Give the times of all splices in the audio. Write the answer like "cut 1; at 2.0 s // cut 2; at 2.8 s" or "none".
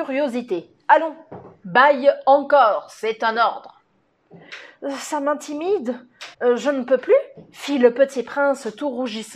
cut 1; at 6.3 s